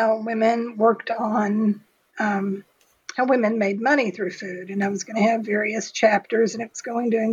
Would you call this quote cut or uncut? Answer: uncut